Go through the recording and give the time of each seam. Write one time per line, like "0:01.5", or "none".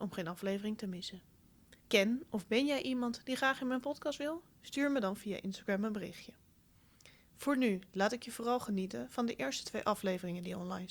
0:01.8